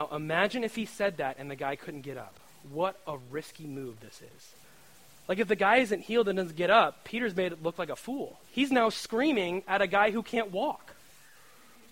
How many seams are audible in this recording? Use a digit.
2